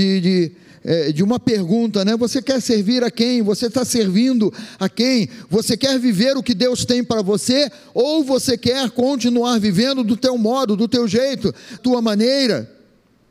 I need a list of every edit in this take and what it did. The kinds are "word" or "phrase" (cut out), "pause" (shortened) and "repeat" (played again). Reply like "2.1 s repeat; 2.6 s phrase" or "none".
11.8 s word